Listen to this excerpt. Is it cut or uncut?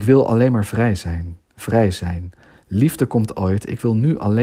uncut